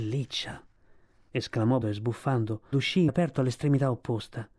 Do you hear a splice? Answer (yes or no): yes